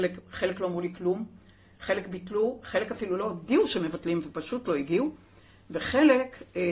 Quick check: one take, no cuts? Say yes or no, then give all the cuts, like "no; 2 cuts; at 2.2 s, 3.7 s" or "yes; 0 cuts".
yes; 0 cuts